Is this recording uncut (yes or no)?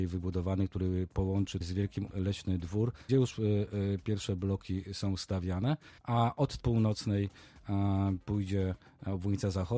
no